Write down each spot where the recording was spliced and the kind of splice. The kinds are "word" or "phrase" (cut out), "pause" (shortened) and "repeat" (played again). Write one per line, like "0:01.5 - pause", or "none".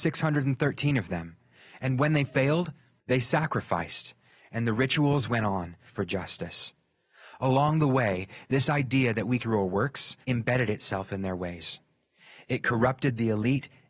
0:05.8 - phrase
0:09.4 - phrase
0:10.2 - pause